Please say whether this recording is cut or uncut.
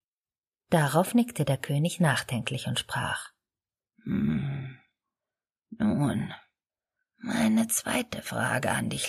uncut